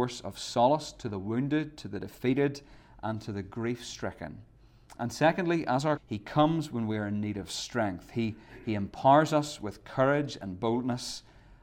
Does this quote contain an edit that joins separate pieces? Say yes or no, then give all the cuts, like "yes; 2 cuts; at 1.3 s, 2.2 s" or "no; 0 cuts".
yes; 1 cut; at 6.0 s